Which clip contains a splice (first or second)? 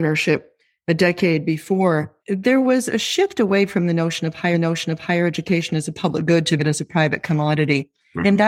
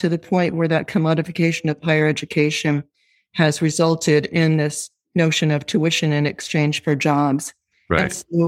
first